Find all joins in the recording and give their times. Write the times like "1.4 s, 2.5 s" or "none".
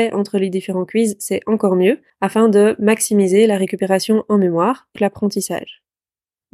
2.1 s, 5.0 s